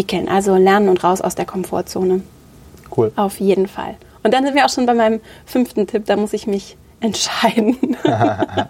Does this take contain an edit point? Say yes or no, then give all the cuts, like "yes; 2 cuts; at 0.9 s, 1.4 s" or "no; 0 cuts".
no; 0 cuts